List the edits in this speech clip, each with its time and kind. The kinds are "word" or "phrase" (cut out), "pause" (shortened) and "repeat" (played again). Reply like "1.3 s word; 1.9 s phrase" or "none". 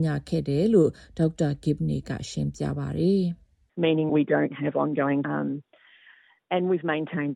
4.1 s word; 5.2 s word